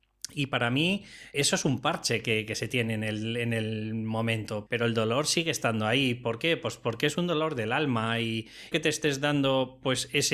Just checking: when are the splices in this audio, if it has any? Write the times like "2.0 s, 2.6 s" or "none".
1.3 s, 4.7 s, 8.7 s